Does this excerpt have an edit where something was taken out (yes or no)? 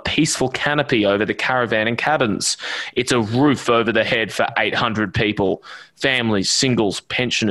no